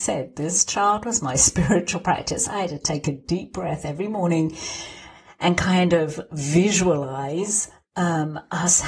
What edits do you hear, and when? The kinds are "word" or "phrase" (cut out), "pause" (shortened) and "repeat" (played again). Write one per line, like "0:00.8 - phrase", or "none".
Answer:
none

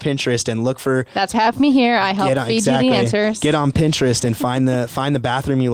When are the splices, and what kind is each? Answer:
0:01.3 - phrase

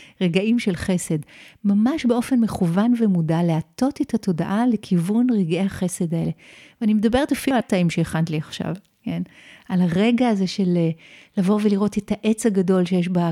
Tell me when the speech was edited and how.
0:07.6 - word

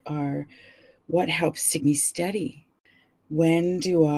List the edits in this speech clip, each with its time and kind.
0:01.8 - word

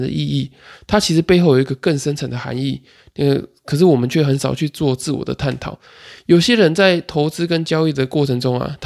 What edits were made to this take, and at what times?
none

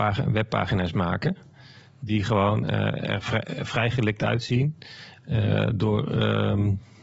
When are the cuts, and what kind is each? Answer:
none

